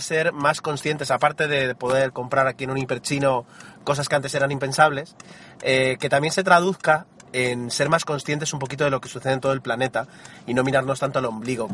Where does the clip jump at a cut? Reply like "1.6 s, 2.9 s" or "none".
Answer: 7.2 s